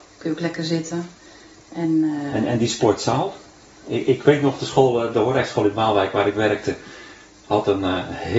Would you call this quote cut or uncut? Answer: uncut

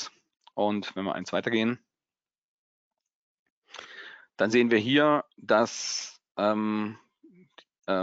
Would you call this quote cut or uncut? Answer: uncut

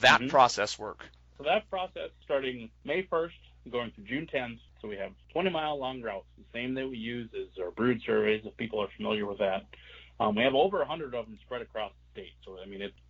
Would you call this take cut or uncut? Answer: uncut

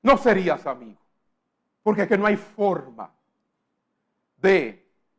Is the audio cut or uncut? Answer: cut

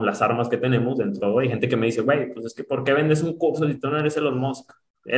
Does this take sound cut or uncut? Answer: cut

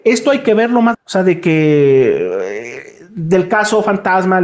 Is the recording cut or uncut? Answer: cut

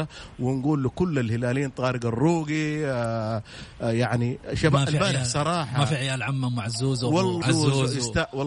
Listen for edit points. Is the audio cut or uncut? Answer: cut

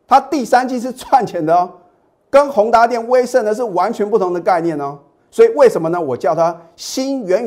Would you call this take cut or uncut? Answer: uncut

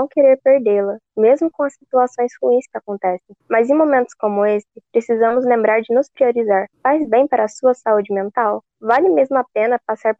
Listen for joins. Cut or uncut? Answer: cut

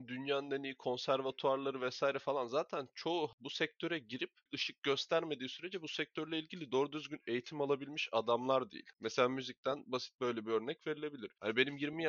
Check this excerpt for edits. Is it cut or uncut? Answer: uncut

